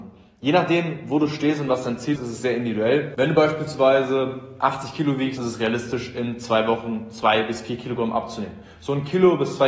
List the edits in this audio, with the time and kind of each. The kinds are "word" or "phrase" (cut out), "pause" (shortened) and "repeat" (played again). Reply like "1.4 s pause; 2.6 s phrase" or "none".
2.2 s word; 5.4 s word